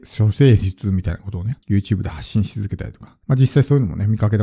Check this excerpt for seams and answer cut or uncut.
cut